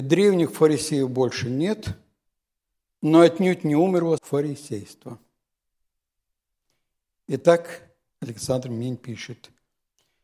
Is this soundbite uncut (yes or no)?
no